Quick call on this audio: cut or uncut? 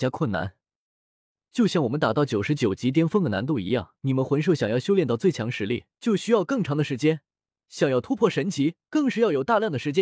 cut